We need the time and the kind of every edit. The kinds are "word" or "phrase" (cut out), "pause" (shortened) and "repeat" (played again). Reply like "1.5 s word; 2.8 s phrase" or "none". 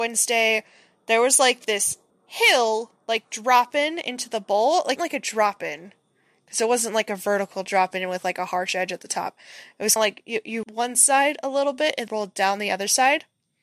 2.1 s pause; 5.0 s phrase; 10.0 s word; 10.6 s phrase; 12.1 s word